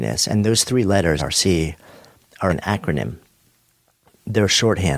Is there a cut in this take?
yes; 2 cuts; at 1.2 s, 2.5 s

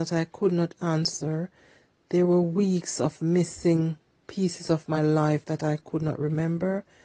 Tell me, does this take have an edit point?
no; 0 cuts

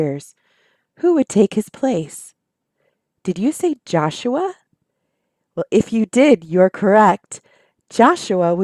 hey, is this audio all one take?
yes; 0 cuts

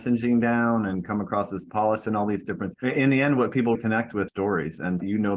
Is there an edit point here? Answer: yes; 3 cuts; at 2.7 s, 3.7 s, 4.3 s

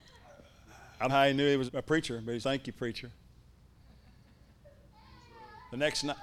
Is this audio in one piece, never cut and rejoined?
no; 3 cuts; at 1.1 s, 1.7 s, 2.4 s

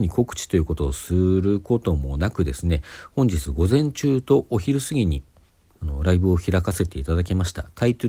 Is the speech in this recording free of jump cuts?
yes; 0 cuts

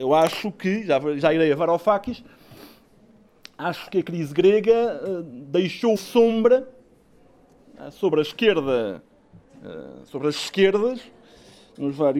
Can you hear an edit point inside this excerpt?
yes; 1 cut; at 6.0 s

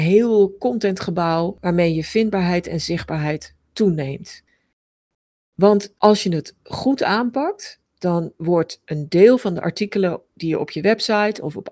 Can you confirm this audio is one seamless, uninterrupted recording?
yes; 0 cuts

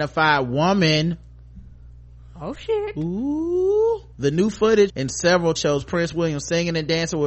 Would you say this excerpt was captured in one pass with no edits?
no; 3 cuts; at 4.1 s, 4.9 s, 5.6 s

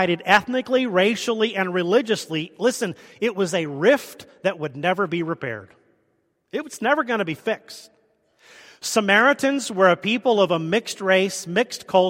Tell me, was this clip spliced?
no; 0 cuts

